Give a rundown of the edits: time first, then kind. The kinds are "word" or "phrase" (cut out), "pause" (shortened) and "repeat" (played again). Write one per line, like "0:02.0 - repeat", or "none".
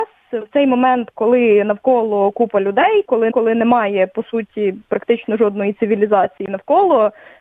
0:03.3 - repeat